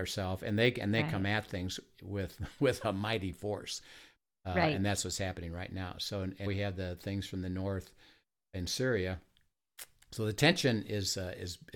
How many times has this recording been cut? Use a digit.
1